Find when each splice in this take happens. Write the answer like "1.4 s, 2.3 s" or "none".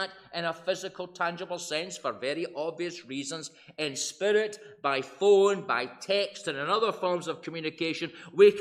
none

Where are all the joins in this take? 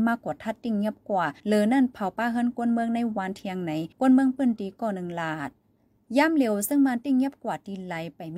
1.4 s, 3.9 s

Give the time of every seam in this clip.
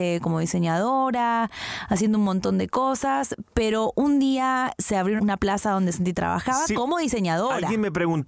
5.2 s

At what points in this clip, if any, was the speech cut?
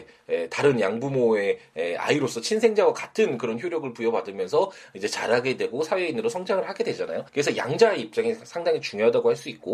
7.3 s

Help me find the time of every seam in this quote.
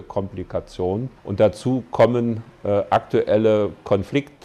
1.2 s

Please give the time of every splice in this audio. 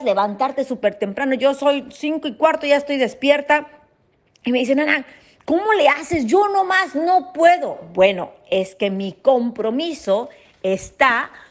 none

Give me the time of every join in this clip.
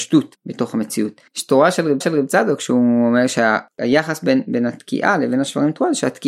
1.3 s, 2.0 s

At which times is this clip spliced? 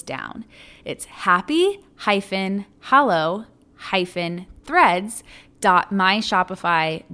none

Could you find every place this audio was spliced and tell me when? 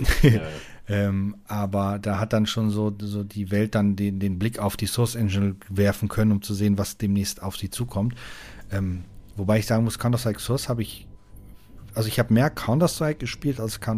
none

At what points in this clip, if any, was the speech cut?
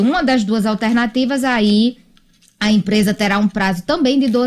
none

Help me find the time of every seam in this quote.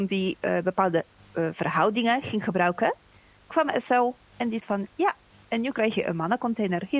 4.6 s

